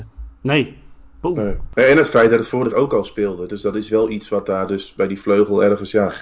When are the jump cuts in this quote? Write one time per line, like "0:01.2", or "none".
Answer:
0:02.7